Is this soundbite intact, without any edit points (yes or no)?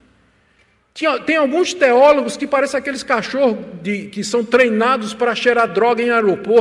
yes